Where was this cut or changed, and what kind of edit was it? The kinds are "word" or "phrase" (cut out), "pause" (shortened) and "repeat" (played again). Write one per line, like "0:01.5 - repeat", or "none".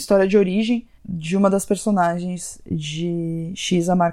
0:01.0 - pause